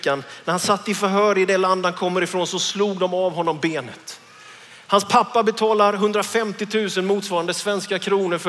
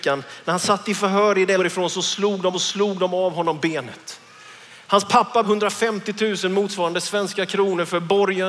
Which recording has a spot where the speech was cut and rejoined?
second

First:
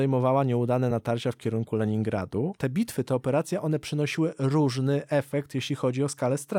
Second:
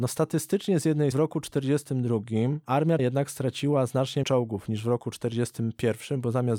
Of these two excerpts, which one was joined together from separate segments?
second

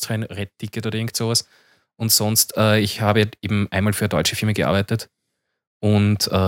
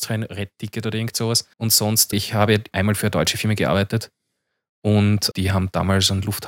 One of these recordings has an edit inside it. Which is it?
second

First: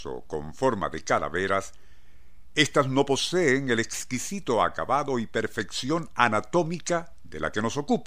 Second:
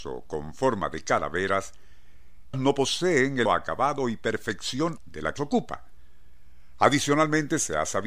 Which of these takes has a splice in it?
second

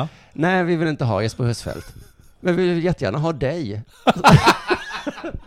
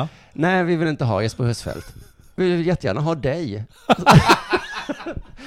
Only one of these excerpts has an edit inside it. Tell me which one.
second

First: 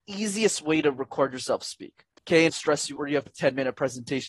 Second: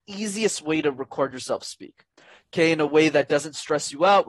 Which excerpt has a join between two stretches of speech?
first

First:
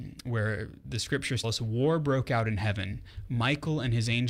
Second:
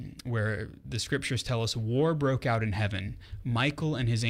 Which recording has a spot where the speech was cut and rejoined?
first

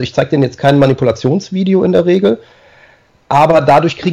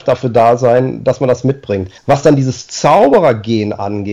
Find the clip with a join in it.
second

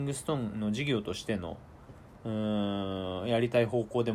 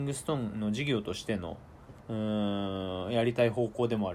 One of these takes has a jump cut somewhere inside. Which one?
second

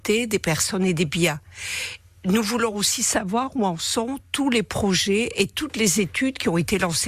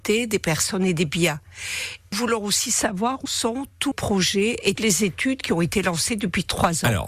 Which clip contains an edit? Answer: second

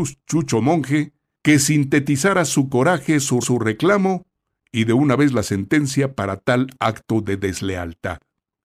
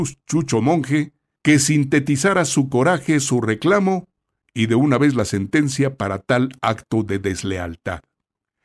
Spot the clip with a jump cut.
first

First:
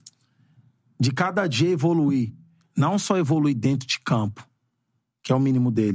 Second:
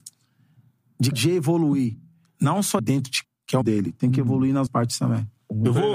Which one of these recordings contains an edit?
second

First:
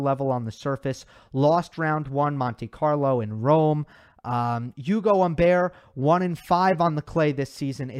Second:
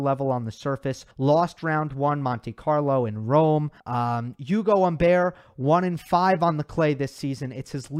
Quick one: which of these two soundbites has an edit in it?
second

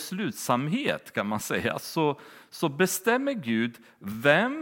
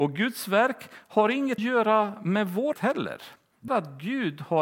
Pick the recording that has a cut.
second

